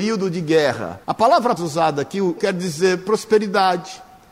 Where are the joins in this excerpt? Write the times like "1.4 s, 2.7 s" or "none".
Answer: 1.0 s, 1.6 s, 2.4 s

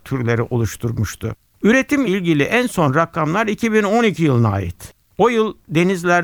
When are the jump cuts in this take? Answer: 2.1 s

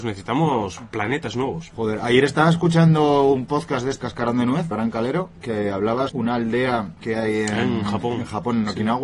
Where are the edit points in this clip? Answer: 4.0 s, 4.7 s, 6.1 s, 7.0 s

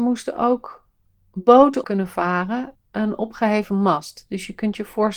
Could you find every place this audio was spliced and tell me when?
1.8 s, 2.7 s

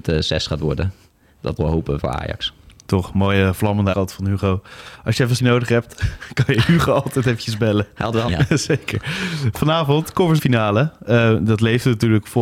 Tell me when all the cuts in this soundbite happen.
1.6 s, 2.0 s, 3.9 s, 5.4 s, 8.3 s, 10.4 s

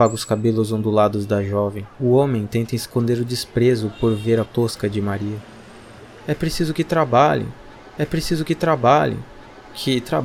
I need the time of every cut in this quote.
1.9 s, 4.5 s, 8.0 s

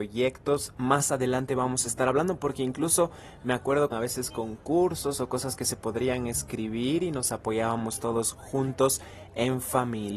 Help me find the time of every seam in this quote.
3.9 s

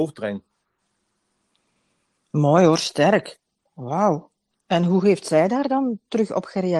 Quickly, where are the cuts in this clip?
4.5 s

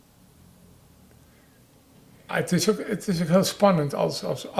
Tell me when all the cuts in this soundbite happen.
2.3 s

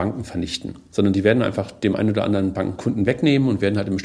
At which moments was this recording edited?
none

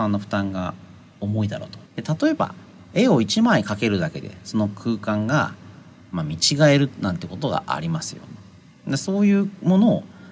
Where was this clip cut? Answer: 1.8 s

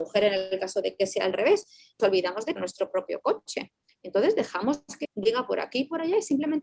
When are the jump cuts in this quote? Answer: 2.0 s, 2.6 s, 5.0 s

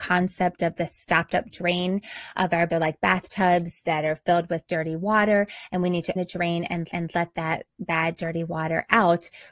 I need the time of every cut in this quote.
2.3 s, 2.7 s, 6.2 s, 6.9 s

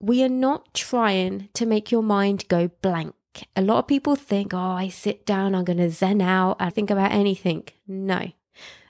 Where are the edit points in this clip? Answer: 6.7 s

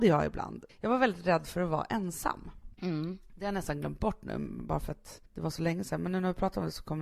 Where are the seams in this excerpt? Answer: 2.7 s, 5.3 s

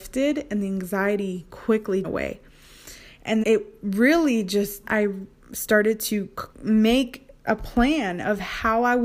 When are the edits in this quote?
2.0 s, 3.4 s, 4.8 s, 6.5 s

